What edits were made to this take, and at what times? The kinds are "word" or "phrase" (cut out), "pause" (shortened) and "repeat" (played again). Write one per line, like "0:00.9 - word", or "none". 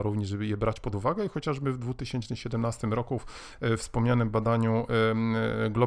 none